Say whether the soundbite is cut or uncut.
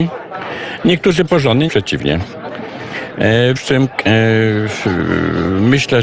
cut